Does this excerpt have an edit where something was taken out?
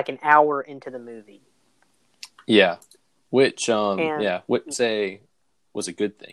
yes; 1 cut; at 4.7 s

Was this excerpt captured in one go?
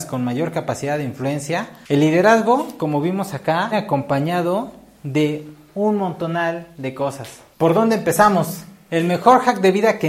no; 1 cut; at 3.7 s

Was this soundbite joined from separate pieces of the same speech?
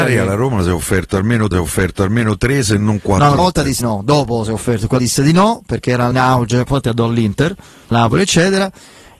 yes; 6 cuts; at 1.5 s, 3.4 s, 3.8 s, 5.0 s, 6.1 s, 7.9 s

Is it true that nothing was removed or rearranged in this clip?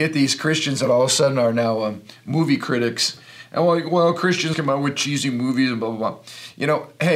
no; 1 cut; at 4.5 s

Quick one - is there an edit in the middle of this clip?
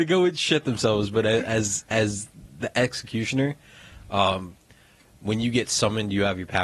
no; 0 cuts

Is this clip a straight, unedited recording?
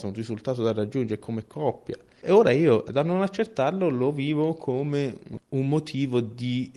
yes; 0 cuts

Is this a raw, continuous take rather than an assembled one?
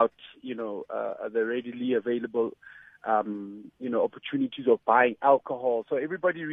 yes; 0 cuts

